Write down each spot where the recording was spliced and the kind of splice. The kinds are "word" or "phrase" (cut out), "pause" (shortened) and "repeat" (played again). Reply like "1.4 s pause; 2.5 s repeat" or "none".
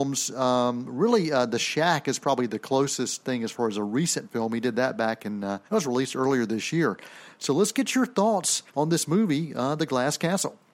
5.7 s pause; 8.7 s pause